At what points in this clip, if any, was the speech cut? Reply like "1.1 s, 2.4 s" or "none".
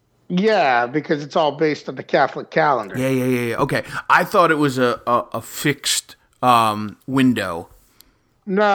none